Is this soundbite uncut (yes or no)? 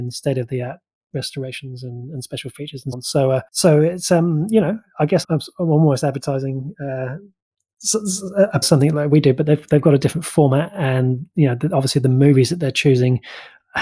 no